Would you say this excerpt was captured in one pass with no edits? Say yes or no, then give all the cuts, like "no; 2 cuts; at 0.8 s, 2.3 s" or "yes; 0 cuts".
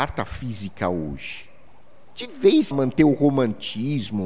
no; 1 cut; at 2.7 s